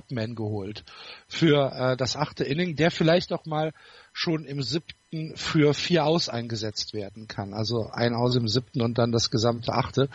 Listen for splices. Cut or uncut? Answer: uncut